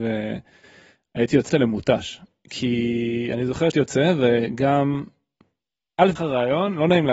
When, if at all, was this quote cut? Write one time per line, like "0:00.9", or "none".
0:01.5
0:03.7
0:06.2